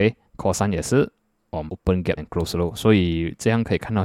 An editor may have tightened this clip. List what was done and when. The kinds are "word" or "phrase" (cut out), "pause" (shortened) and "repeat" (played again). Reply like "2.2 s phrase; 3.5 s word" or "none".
1.7 s word; 2.2 s word

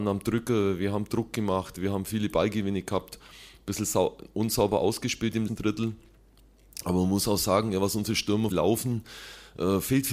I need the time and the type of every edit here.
5.5 s word; 8.5 s word

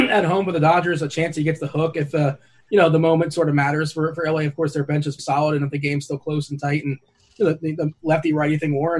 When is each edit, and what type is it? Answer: 5.2 s word

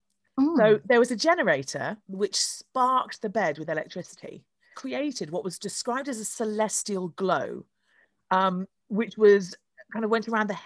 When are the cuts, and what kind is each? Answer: 2.0 s pause; 4.7 s phrase; 8.8 s pause

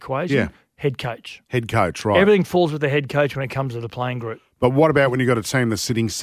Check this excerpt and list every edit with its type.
1.5 s pause

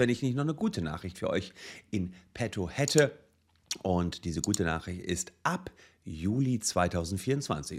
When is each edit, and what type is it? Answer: none

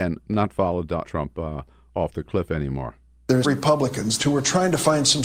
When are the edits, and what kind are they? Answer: 1.0 s word; 3.4 s word; 4.2 s phrase

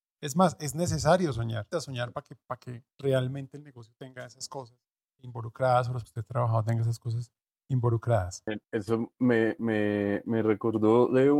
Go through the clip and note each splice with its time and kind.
1.7 s word; 2.9 s pause; 5.2 s word; 6.0 s phrase; 8.6 s pause

